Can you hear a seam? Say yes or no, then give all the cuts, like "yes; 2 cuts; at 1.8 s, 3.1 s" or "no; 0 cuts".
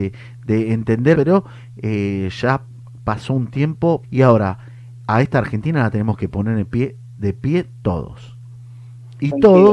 yes; 2 cuts; at 1.1 s, 4.0 s